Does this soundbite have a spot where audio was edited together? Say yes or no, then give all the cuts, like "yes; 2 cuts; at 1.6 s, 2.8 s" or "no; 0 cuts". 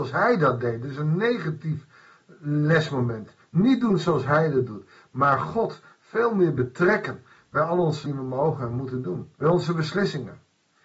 yes; 2 cuts; at 8.1 s, 9.4 s